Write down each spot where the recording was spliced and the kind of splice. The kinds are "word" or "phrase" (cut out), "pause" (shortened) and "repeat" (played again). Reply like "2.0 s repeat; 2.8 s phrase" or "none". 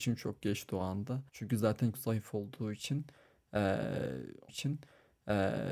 1.3 s pause; 1.9 s phrase; 4.5 s repeat